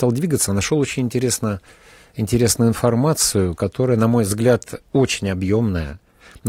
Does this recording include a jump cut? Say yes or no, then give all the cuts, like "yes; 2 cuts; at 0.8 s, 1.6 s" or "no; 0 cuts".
no; 0 cuts